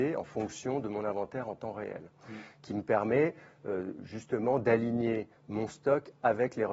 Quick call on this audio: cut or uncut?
uncut